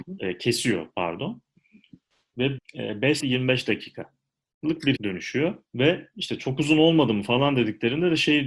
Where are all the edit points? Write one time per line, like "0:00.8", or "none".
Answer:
0:02.6
0:03.2
0:05.0
0:05.7